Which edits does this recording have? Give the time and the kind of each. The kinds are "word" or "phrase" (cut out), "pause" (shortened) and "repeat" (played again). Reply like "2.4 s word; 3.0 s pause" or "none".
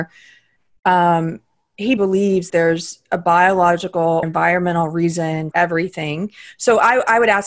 2.0 s word; 2.5 s word; 4.2 s word; 5.5 s word

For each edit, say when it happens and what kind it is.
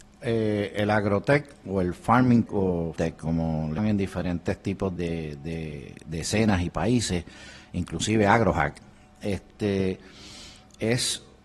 2.5 s word; 3.0 s word; 3.8 s word; 5.0 s word

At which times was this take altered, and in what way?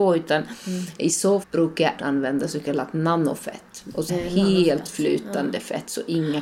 1.4 s word; 2.0 s word; 4.1 s word

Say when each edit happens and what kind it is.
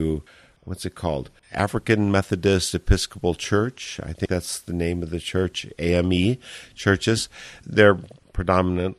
1.4 s pause

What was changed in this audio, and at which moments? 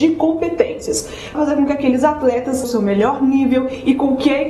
1.3 s word; 2.6 s word

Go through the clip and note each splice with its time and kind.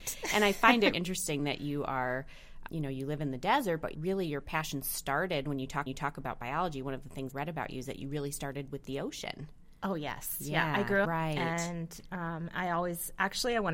0.9 s word; 2.7 s word; 3.9 s word; 5.9 s repeat; 7.3 s word; 11.0 s phrase

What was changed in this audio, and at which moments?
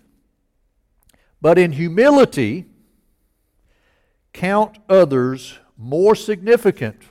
none

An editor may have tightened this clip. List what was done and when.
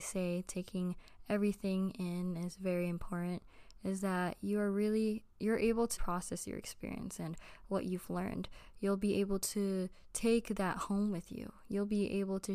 5.3 s pause; 6.0 s word

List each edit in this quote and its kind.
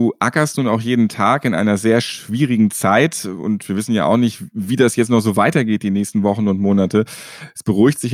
none

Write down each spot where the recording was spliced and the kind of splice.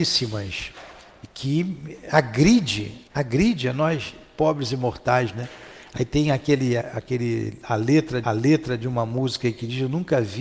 3.1 s pause; 6.8 s word; 8.2 s repeat

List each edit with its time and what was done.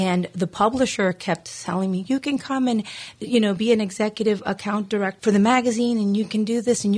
5.2 s word

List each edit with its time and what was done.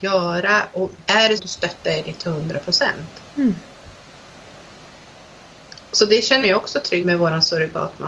1.4 s word; 3.3 s pause; 6.4 s word; 7.0 s word

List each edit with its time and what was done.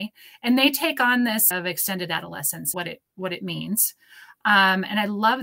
1.5 s word; 2.7 s word

